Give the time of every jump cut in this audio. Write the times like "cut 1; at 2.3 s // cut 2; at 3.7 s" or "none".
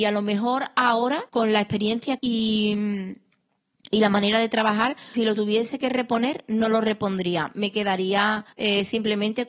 cut 1; at 1.3 s // cut 2; at 2.2 s // cut 3; at 5.1 s // cut 4; at 8.5 s

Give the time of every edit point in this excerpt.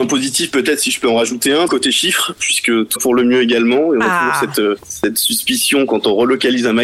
cut 1; at 1.7 s // cut 2; at 3.0 s // cut 3; at 4.8 s

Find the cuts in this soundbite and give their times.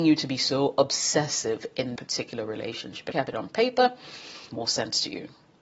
cut 1; at 2.0 s // cut 2; at 3.1 s // cut 3; at 4.5 s

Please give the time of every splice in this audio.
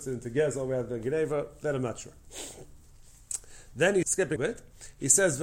cut 1; at 4.0 s // cut 2; at 4.4 s

